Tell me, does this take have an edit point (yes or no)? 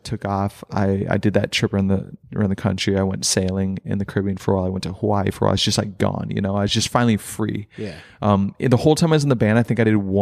no